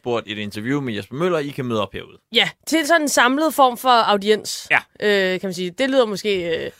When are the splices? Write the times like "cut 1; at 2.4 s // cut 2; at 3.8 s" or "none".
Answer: none